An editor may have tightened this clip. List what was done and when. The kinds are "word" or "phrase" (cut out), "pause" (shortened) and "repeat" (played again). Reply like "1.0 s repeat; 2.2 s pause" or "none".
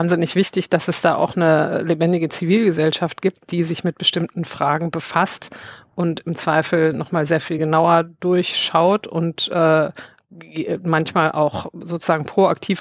none